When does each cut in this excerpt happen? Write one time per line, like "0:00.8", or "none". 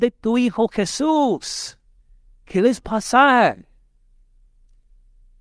0:02.0
0:02.8